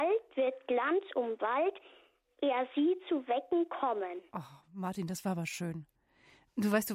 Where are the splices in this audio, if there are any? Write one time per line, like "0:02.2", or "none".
0:04.3